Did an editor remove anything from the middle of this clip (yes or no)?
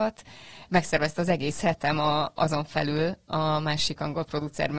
no